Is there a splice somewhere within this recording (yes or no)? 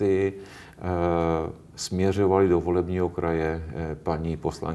no